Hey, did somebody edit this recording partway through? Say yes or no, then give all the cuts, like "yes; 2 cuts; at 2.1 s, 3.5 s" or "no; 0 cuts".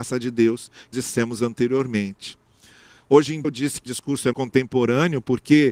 yes; 4 cuts; at 0.9 s, 3.4 s, 3.9 s, 4.3 s